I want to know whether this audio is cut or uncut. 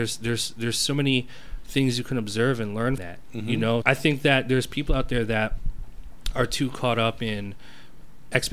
cut